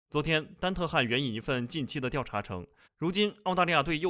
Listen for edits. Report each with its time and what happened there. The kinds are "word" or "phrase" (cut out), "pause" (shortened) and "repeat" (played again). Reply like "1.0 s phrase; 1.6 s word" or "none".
2.8 s pause